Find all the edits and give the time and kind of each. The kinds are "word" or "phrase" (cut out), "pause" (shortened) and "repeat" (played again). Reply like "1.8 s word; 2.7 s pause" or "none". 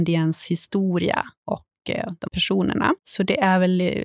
1.4 s pause; 2.3 s word; 3.0 s pause

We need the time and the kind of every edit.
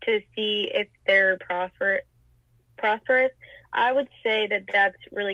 1.4 s word

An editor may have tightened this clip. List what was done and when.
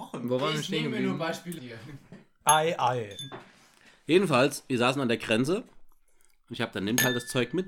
1.6 s word; 6.7 s word

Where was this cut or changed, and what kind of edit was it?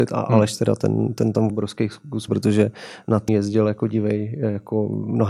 1.5 s word; 2.3 s word; 3.3 s word

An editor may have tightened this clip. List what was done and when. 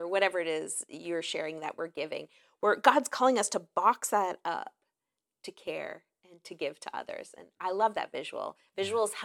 none

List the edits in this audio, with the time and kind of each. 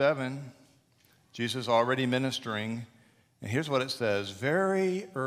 none

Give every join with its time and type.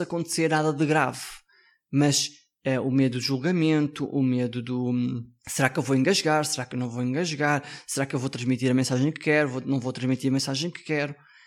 none

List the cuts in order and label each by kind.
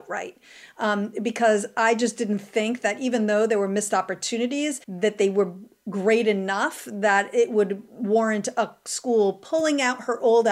4.8 s pause; 7.9 s pause

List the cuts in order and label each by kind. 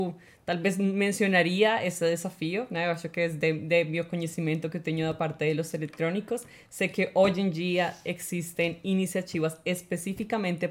none

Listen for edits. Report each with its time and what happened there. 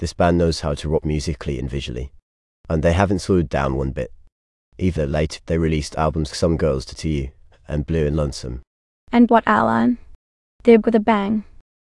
1.0 s word; 5.0 s word; 5.4 s word; 6.3 s word; 9.3 s word; 10.8 s word

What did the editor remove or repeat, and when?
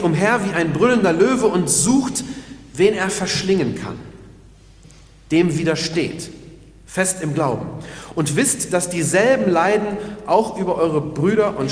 none

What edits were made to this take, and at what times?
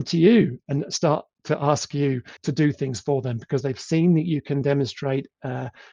2.4 s pause

